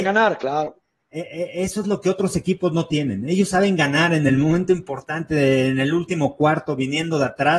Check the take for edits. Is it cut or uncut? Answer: uncut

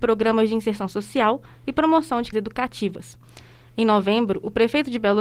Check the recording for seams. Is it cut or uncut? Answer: cut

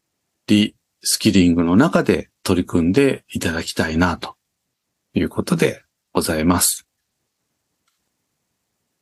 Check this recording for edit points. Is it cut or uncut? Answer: cut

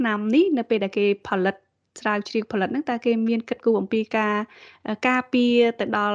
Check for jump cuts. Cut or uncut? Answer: uncut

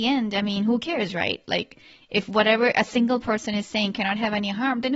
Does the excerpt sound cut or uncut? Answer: uncut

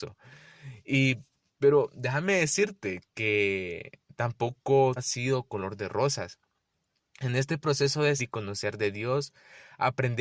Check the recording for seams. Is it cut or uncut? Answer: cut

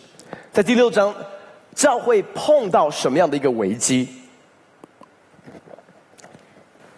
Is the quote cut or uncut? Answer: uncut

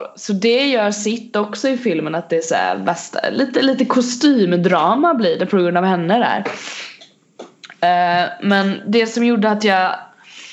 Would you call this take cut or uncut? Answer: uncut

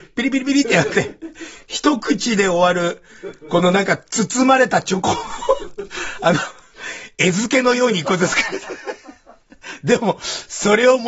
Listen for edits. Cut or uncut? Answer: uncut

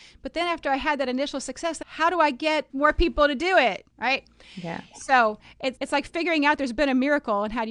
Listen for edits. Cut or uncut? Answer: cut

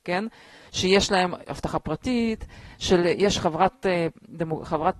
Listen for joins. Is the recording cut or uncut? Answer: uncut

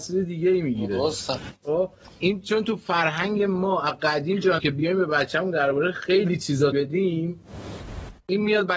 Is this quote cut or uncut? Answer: cut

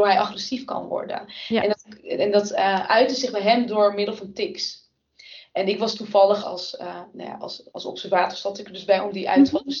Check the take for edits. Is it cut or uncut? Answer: cut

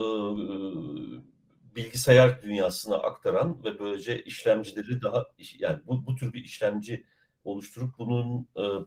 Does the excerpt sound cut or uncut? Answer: uncut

